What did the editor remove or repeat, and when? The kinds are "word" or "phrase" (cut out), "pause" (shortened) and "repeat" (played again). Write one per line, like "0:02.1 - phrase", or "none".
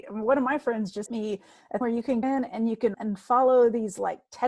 0:01.1 - word
0:01.8 - word
0:02.2 - word
0:02.9 - word